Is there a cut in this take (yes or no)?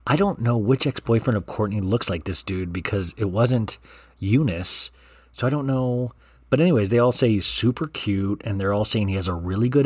no